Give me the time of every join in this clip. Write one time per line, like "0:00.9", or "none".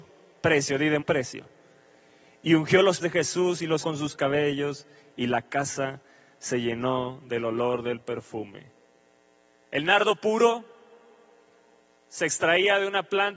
0:01.0
0:03.0
0:03.8

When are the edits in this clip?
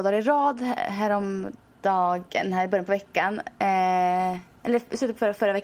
0:02.3

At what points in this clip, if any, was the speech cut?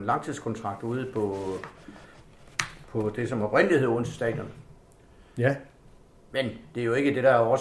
none

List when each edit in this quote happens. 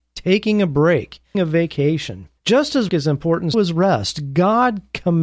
0:01.3
0:02.4
0:02.9
0:03.5

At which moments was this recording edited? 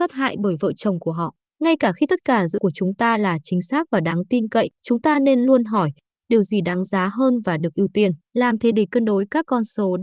0:02.6
0:04.7
0:08.2
0:08.7

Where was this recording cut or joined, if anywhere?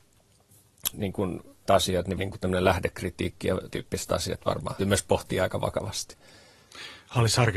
0:00.9
0:01.7
0:02.2
0:03.7
0:04.8

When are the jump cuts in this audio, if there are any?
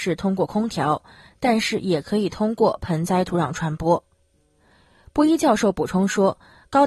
none

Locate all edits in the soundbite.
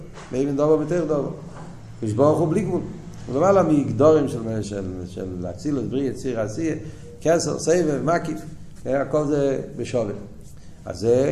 0:04.6

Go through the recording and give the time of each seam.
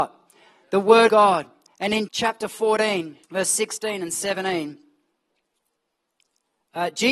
0:01.1
0:02.1
0:03.2

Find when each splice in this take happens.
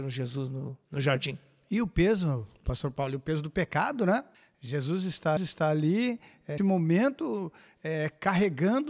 0:04.3
0:05.4
0:06.6

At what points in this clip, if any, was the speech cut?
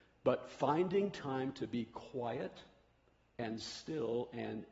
none

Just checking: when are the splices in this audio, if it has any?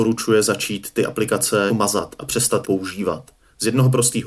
0:01.7
0:02.6

